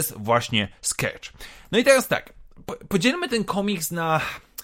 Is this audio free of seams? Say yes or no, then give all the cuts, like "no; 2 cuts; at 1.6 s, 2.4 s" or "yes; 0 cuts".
yes; 0 cuts